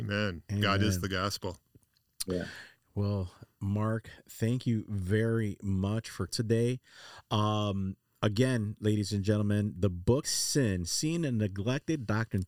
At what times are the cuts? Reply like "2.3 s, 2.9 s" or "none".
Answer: 6.3 s, 10.2 s